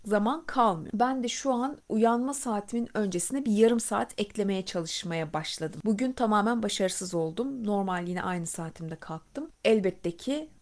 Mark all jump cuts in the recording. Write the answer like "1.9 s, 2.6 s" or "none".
none